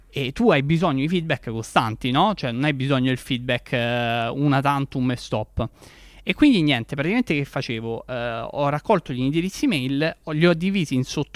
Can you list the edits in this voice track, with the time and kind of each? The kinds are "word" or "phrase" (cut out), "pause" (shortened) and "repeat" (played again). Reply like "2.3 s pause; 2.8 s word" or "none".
none